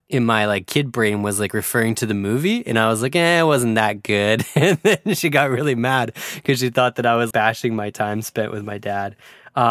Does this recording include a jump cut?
yes; 1 cut; at 7.3 s

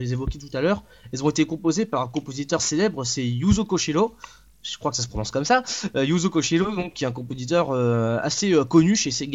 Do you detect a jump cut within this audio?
no; 0 cuts

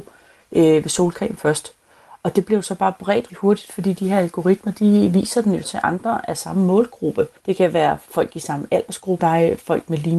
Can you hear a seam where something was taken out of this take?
yes; 4 cuts; at 3.3 s, 5.6 s, 7.4 s, 9.2 s

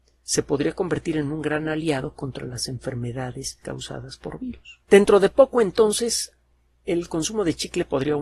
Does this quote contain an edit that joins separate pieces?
yes; 2 cuts; at 3.6 s, 4.8 s

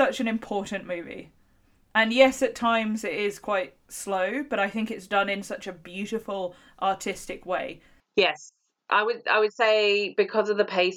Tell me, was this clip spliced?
no; 0 cuts

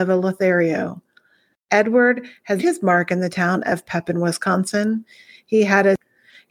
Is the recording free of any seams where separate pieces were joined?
no; 1 cut; at 2.6 s

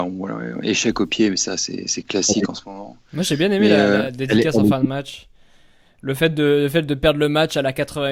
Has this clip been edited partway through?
no; 0 cuts

